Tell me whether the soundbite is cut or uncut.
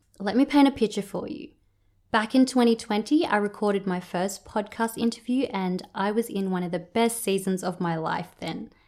uncut